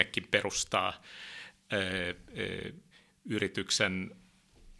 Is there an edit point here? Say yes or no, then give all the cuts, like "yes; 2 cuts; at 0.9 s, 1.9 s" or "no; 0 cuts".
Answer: no; 0 cuts